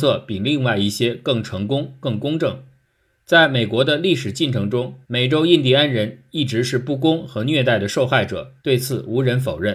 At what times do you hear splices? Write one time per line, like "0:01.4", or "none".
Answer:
0:05.0
0:08.6